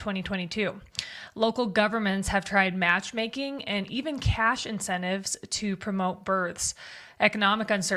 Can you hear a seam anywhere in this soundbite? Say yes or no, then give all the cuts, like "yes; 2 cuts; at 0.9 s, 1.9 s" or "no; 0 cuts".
no; 0 cuts